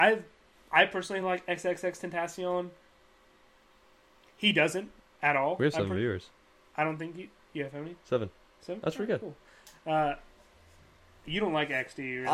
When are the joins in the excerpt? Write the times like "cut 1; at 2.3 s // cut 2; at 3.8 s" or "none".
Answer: none